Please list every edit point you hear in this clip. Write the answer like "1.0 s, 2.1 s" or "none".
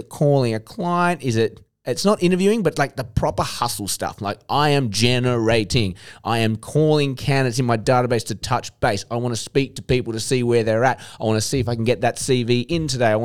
none